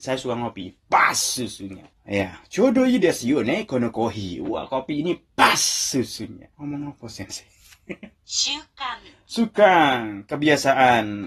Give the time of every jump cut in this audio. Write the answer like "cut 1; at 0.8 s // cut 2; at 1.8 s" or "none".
cut 1; at 1.9 s // cut 2; at 6.5 s // cut 3; at 8.2 s